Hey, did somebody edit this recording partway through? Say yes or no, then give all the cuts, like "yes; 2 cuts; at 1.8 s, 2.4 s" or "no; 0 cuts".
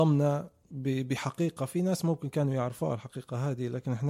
no; 0 cuts